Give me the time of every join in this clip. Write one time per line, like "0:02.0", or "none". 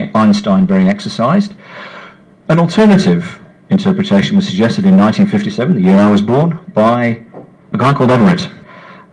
0:07.7

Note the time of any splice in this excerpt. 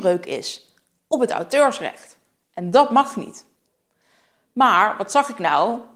none

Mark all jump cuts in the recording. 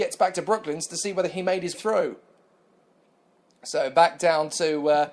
0:01.7

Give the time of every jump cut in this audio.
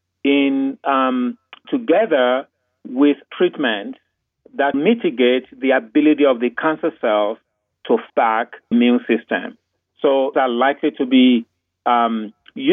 0:01.6
0:03.3
0:04.7
0:08.1
0:08.7
0:10.3

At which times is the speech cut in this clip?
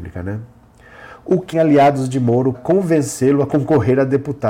0:01.5
0:02.5

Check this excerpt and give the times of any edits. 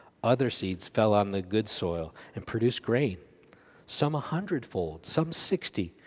none

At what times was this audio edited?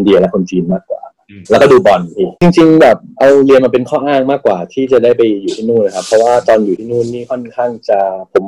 0:01.5
0:02.4

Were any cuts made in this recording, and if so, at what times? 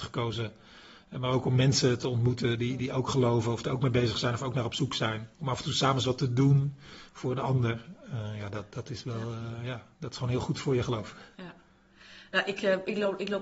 0:05.3

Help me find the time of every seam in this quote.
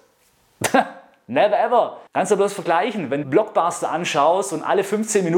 0:02.1
0:03.2

